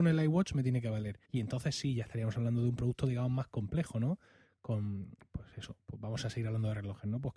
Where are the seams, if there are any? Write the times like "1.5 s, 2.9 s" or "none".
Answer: 1.2 s